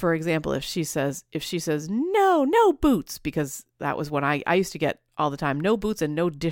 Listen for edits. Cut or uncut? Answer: uncut